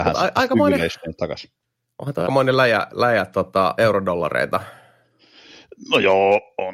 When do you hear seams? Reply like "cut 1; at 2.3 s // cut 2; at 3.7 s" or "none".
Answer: cut 1; at 2.3 s // cut 2; at 3.8 s